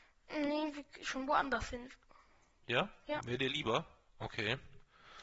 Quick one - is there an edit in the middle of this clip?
no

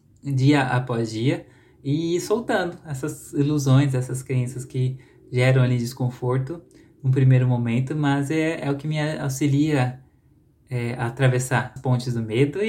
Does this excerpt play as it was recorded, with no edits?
no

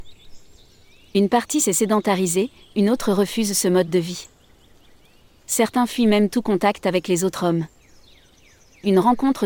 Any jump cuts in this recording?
no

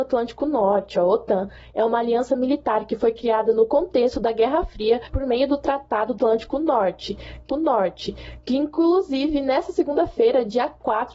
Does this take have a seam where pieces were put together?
yes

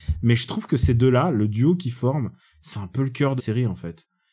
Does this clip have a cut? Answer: yes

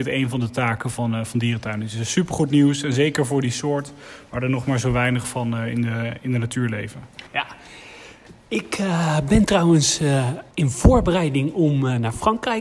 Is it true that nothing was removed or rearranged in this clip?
no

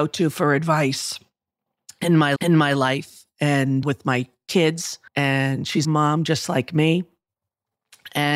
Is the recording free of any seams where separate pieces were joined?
no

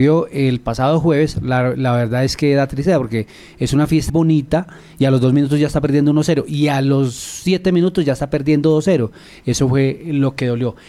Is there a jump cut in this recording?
yes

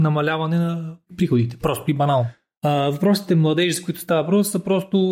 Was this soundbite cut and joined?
no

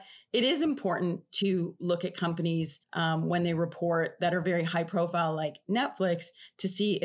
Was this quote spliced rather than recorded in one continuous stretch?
yes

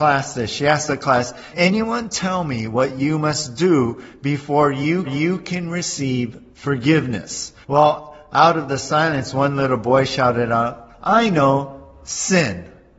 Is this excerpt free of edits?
no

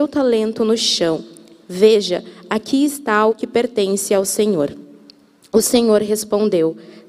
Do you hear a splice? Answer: no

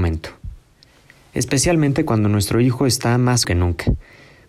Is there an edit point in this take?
yes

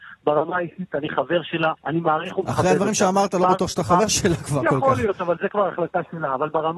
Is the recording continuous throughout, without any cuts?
no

